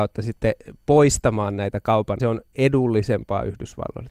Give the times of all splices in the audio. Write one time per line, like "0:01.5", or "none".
0:02.2